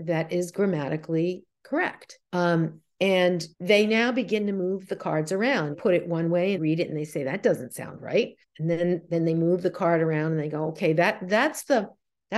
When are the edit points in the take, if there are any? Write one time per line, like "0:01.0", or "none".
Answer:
0:02.3
0:03.5
0:05.7
0:06.6
0:08.4